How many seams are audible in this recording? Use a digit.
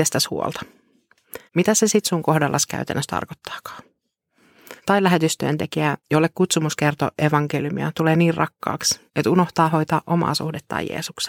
4